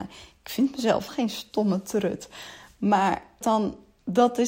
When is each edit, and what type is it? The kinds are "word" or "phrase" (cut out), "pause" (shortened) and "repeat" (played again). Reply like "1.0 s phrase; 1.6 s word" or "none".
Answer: 1.1 s word; 3.4 s word